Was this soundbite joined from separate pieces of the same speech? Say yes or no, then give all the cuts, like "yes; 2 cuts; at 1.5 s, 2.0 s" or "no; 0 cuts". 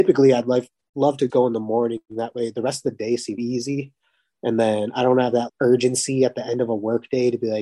yes; 3 cuts; at 1.3 s, 3.4 s, 5.5 s